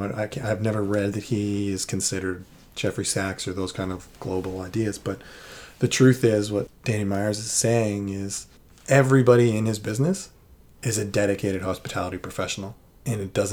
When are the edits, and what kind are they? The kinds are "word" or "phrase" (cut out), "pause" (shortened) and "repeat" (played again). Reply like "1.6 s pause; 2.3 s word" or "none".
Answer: none